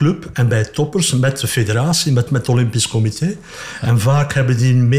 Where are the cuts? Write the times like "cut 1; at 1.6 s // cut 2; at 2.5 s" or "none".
cut 1; at 2.3 s